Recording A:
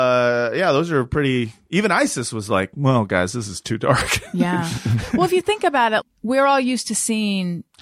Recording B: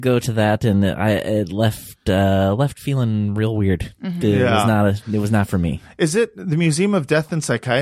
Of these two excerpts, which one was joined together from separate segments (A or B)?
A